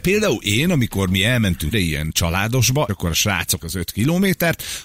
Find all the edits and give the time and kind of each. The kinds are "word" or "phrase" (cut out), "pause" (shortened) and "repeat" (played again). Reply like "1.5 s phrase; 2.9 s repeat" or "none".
1.7 s word; 2.9 s word; 3.6 s word

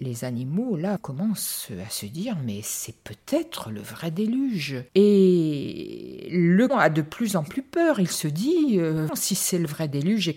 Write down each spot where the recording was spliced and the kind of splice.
1.0 s word; 4.9 s pause; 6.7 s word; 9.1 s word

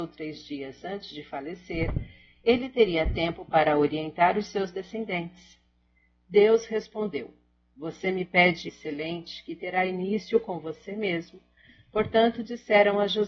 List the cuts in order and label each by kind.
8.7 s word

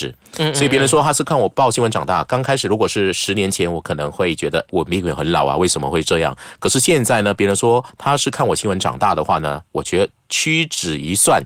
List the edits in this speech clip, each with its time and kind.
4.7 s word

